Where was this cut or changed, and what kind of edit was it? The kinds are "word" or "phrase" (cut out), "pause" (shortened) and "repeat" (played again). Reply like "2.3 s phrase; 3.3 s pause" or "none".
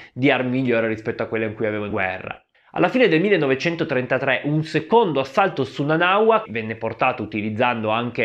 1.9 s word; 2.5 s pause; 6.5 s word

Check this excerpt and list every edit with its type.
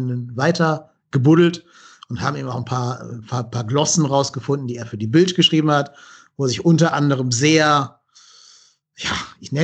none

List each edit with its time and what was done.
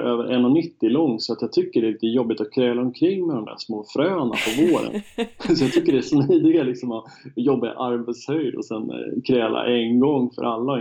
none

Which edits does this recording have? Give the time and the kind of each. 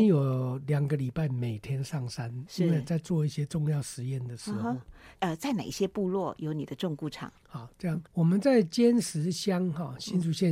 5.2 s phrase; 7.4 s pause; 8.1 s pause

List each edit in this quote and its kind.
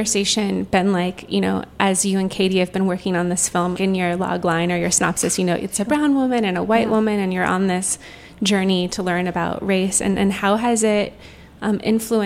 3.7 s word

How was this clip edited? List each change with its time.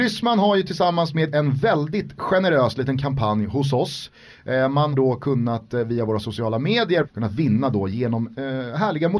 1.3 s phrase; 4.9 s word; 7.0 s phrase

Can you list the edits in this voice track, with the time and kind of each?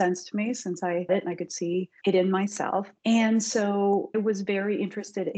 1.1 s word; 2.0 s pause; 3.0 s pause; 4.1 s word

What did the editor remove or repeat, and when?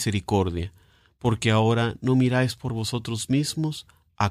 none

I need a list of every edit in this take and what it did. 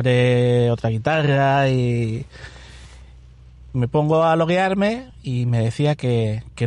none

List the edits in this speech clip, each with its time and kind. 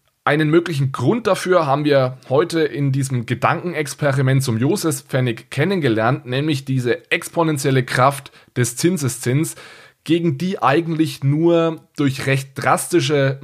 none

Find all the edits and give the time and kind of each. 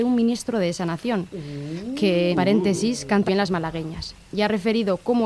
2.3 s word; 3.3 s word

